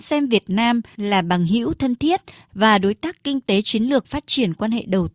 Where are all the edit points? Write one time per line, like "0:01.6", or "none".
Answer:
0:04.0

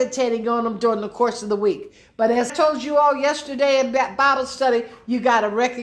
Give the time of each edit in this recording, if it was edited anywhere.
0:02.5

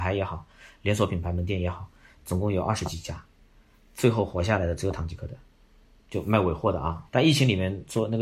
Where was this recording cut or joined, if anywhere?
none

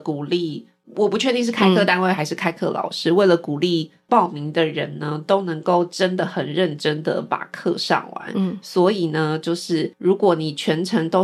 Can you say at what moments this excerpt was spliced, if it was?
0:09.9

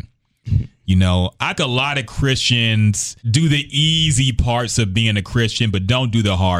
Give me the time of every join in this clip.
0:01.6
0:03.2

